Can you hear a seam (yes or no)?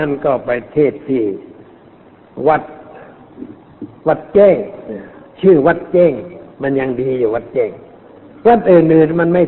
yes